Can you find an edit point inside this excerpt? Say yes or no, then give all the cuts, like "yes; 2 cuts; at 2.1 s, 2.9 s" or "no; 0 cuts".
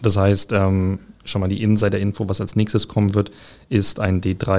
no; 0 cuts